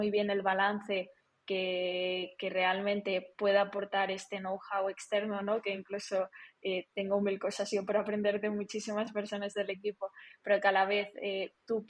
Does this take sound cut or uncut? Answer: uncut